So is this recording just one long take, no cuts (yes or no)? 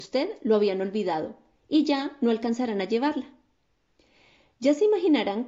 yes